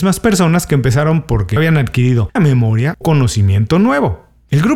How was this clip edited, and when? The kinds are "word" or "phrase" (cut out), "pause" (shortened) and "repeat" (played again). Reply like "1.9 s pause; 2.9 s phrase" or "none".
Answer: 1.6 s word; 2.4 s word; 3.0 s word